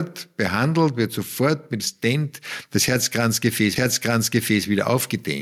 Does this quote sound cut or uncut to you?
cut